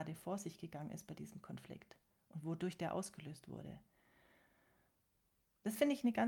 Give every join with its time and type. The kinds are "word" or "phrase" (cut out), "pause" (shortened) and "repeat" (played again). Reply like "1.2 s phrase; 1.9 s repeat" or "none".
none

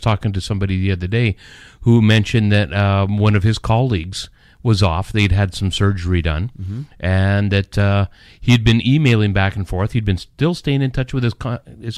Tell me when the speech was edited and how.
none

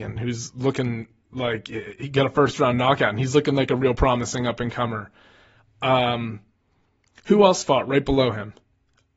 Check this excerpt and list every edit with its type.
none

